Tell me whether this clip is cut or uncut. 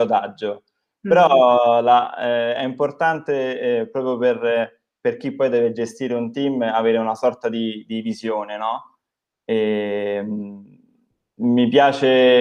uncut